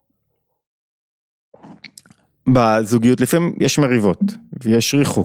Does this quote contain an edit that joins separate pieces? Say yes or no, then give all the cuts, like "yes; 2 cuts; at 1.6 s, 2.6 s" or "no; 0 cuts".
no; 0 cuts